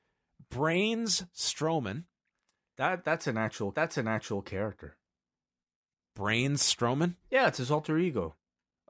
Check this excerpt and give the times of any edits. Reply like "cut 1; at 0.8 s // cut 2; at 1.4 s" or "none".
cut 1; at 3.7 s // cut 2; at 7.2 s